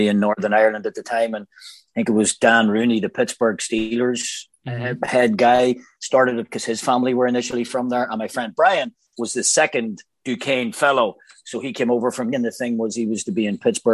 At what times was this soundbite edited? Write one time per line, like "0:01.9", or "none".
0:12.3